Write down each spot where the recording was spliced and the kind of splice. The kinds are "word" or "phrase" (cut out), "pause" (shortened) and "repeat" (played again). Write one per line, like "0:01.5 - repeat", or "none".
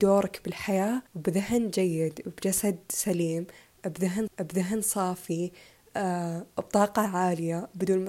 0:01.1 - pause
0:04.3 - repeat